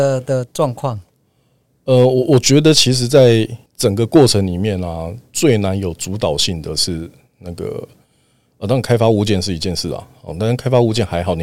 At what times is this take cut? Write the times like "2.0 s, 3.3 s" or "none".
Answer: 3.7 s